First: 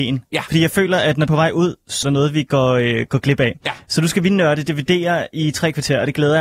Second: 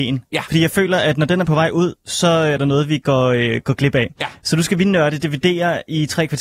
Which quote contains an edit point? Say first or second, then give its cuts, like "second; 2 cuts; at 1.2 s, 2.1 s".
first; 2 cuts; at 1.3 s, 2.0 s